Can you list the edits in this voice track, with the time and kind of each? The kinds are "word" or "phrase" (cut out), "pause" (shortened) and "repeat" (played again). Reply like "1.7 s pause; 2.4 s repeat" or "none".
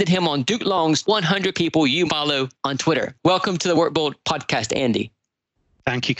1.0 s word; 1.5 s phrase; 2.1 s word; 2.5 s pause; 3.2 s pause